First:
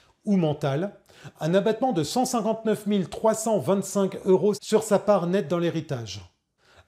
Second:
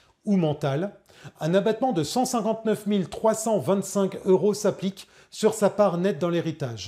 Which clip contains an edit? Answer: first; 1 cut; at 4.5 s

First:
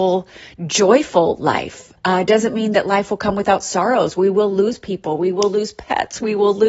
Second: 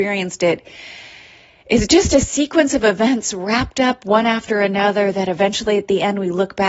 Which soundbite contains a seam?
first; 1 cut; at 2.0 s

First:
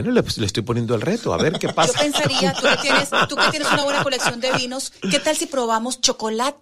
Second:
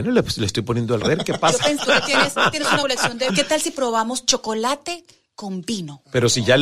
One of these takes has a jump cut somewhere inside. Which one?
second; 5 cuts; at 1.0 s, 1.8 s, 2.5 s, 2.8 s, 3.3 s

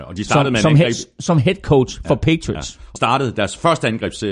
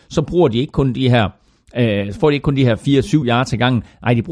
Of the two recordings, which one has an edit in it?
first; 1 cut; at 3.0 s

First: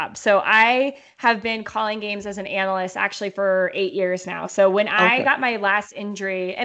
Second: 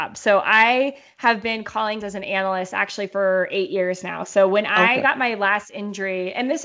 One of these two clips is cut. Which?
second; 1 cut; at 2.0 s

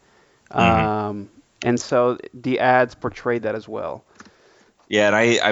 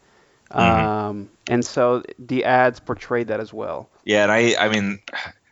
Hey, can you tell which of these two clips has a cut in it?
second; 2 cuts; at 1.4 s, 4.0 s

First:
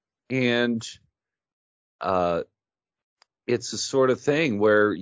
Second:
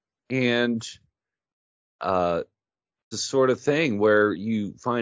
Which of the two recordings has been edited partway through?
second; 1 cut; at 3.1 s

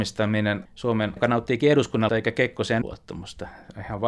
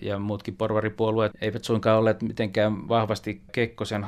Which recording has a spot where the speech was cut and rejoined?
first; 3 cuts; at 1.2 s, 2.1 s, 2.8 s

